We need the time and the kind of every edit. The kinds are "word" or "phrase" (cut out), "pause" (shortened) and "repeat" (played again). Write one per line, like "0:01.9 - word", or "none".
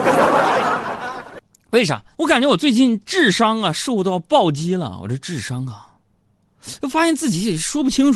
0:02.1 - pause